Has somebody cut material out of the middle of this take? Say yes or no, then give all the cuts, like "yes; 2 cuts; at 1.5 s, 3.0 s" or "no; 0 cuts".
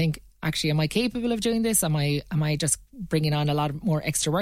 no; 0 cuts